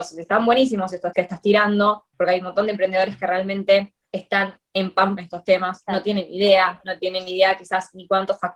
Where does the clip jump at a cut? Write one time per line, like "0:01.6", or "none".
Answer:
0:01.1
0:02.1
0:04.0
0:05.2